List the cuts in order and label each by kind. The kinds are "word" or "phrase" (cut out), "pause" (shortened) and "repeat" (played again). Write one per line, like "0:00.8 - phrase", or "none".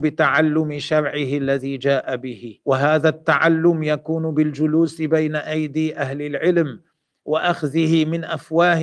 0:02.6 - pause